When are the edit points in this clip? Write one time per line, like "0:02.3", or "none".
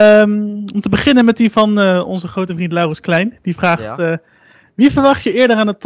none